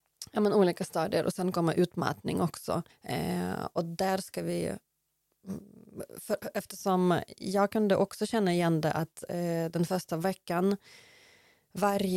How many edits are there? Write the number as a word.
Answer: one